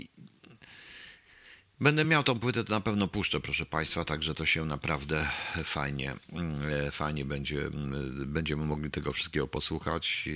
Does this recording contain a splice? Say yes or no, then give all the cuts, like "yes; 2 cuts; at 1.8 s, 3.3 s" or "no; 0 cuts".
no; 0 cuts